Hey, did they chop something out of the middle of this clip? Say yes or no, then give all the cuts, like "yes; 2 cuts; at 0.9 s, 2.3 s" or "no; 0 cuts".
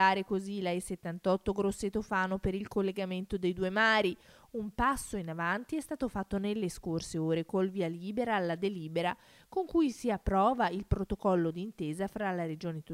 no; 0 cuts